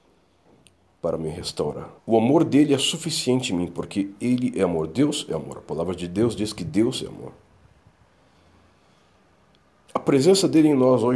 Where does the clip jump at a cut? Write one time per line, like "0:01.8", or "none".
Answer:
0:02.0